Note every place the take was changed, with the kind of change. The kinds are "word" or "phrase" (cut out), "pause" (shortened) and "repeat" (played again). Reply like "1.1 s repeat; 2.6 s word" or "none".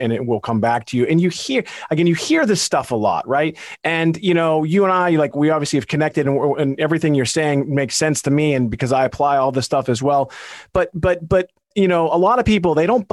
6.6 s word